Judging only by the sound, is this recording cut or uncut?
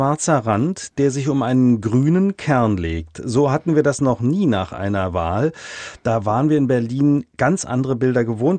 cut